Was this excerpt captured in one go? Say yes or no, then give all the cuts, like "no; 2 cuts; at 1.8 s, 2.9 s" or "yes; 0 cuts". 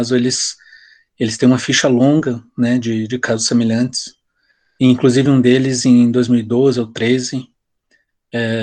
yes; 0 cuts